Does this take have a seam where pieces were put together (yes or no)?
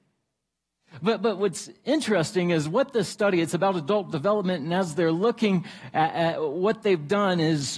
no